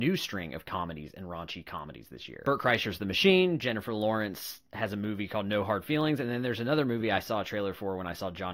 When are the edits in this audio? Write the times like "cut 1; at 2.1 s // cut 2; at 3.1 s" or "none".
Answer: none